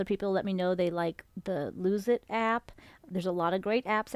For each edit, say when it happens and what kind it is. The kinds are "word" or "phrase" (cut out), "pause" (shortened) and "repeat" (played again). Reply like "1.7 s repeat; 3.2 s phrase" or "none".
none

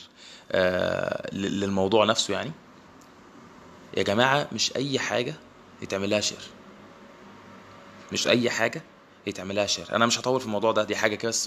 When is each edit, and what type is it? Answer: none

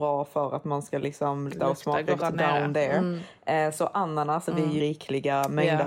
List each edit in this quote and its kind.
1.5 s word; 2.2 s word; 4.5 s word; 4.8 s word

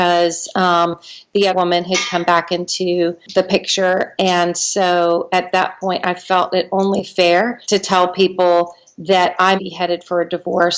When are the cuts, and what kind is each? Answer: 1.5 s word; 7.6 s pause; 9.6 s word

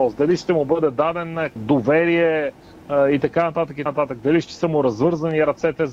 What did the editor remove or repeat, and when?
1.6 s word; 3.9 s word

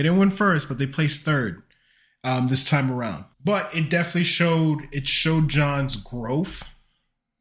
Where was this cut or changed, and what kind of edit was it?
3.3 s pause

